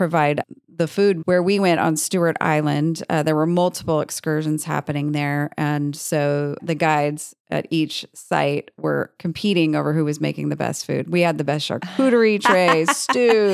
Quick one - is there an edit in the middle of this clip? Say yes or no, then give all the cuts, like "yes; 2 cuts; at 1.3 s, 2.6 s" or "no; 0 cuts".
yes; 2 cuts; at 1.2 s, 6.6 s